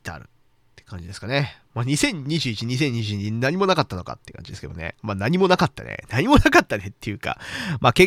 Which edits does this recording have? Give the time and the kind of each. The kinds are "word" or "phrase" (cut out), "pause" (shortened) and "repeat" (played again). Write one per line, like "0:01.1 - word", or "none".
0:05.0 - pause